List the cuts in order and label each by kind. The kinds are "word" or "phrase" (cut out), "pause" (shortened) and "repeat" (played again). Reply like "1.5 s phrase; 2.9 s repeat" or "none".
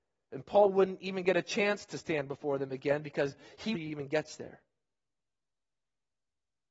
3.7 s phrase